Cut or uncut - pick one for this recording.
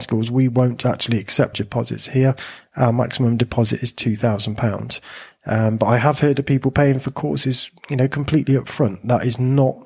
cut